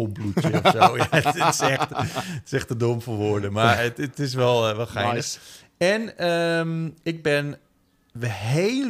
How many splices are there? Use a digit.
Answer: 0